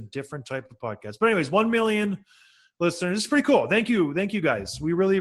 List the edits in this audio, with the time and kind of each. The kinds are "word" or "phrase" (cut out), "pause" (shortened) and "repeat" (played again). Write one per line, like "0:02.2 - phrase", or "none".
none

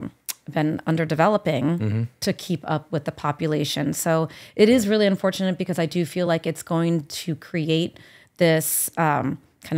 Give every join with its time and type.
none

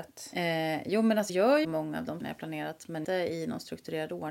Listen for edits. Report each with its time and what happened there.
0:01.3 - word
0:01.6 - word
0:02.2 - word
0:03.0 - word

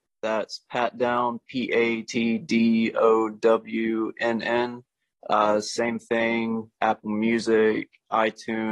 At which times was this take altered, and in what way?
0:02.0 - word
0:06.7 - word

